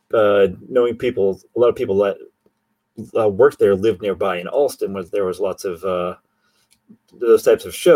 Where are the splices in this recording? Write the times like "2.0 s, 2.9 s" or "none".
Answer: none